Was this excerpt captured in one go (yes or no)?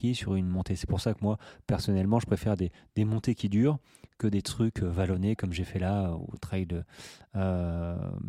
yes